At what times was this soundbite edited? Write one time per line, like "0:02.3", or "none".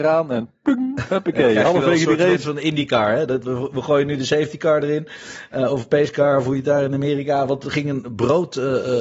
none